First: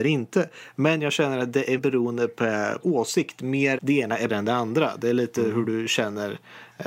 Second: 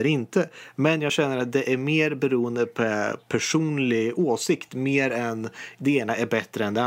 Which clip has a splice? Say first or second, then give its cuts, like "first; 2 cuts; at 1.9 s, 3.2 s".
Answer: first; 4 cuts; at 1.8 s, 2.8 s, 3.8 s, 4.3 s